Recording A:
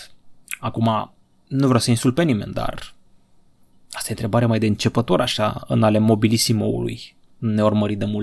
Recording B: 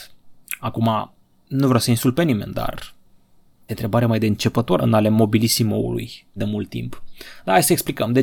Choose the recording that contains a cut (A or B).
B